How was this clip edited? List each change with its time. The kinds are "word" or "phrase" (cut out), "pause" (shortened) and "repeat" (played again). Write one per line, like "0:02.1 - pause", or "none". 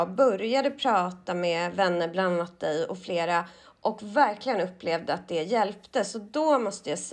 none